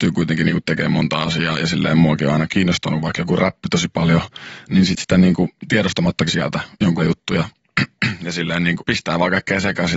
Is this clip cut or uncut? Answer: cut